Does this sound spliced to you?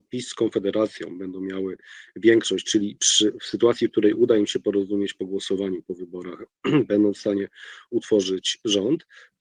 no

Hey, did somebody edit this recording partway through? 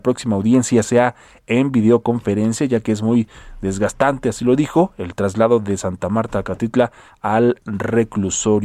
no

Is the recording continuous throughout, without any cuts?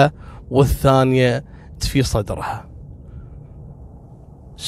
no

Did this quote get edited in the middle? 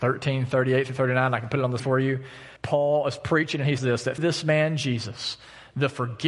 yes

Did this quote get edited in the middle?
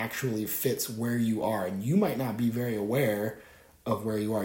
no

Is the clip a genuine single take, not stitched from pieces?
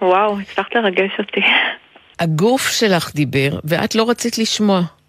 yes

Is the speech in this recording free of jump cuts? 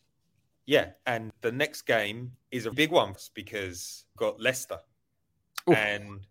no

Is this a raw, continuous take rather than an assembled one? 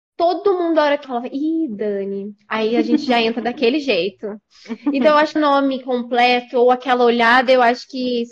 no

